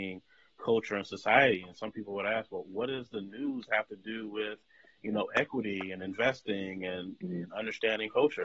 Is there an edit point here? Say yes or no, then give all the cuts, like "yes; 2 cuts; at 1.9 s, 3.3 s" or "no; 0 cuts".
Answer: no; 0 cuts